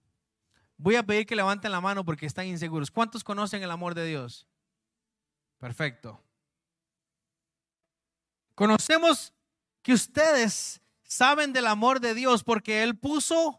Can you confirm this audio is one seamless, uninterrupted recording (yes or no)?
yes